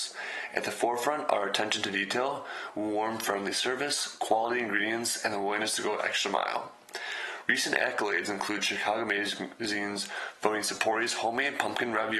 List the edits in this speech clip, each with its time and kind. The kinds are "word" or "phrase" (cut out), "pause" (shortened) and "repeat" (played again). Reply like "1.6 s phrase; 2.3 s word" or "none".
none